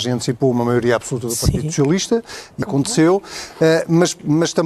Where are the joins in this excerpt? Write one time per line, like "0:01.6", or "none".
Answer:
0:02.6

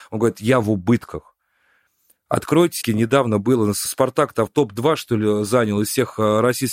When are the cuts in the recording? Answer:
0:02.8
0:03.9
0:04.5

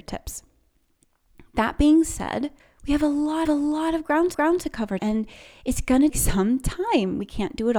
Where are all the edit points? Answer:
0:02.6
0:03.5
0:04.3
0:05.0
0:06.1

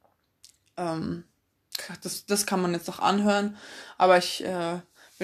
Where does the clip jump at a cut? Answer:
none

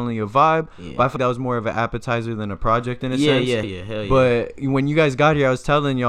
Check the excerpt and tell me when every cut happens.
0:01.2
0:03.6

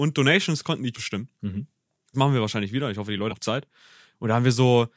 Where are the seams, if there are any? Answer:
0:00.9
0:02.1
0:03.3

